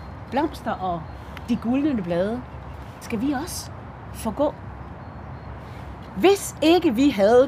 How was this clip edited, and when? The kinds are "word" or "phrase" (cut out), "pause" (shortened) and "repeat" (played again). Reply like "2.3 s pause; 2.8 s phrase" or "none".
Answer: 3.0 s word